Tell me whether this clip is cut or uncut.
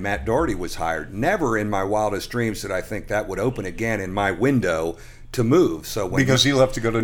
uncut